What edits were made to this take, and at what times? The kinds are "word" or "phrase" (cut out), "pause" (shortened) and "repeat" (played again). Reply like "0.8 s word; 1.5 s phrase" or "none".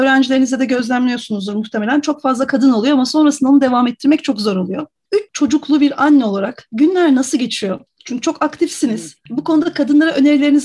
7.9 s pause